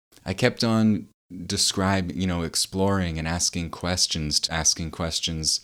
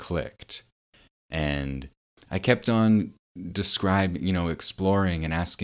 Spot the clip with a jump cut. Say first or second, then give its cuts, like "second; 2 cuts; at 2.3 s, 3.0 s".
first; 1 cut; at 4.5 s